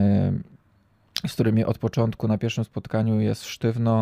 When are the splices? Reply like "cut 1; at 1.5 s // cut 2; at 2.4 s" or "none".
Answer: none